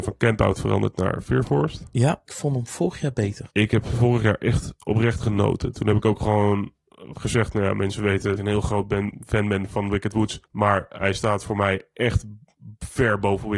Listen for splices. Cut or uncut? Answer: cut